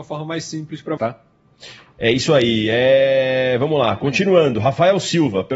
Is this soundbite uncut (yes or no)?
no